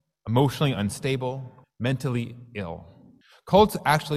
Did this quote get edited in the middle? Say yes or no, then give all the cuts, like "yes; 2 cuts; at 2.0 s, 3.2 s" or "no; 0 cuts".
yes; 2 cuts; at 1.6 s, 3.2 s